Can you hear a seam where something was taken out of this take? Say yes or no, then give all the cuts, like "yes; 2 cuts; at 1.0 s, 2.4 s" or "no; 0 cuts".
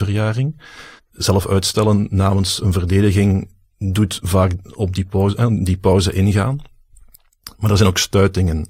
yes; 1 cut; at 1.0 s